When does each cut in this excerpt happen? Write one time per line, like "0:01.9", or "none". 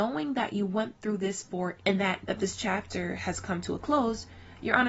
0:01.8
0:02.2